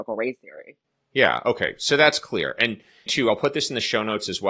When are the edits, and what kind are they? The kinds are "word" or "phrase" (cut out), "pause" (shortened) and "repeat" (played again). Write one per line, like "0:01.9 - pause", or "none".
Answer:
0:03.1 - word